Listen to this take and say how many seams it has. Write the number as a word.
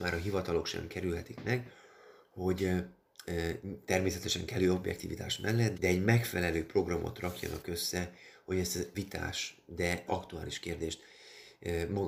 three